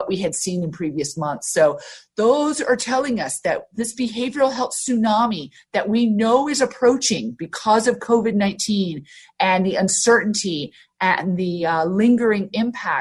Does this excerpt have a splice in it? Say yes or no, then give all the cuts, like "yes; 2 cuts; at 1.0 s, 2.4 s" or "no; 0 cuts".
no; 0 cuts